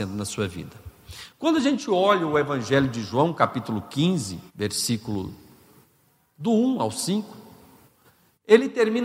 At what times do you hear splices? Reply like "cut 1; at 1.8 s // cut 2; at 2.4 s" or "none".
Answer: cut 1; at 4.5 s